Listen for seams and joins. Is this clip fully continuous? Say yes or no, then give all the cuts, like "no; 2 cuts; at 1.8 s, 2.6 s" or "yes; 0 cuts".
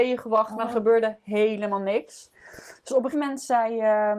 no; 1 cut; at 3.1 s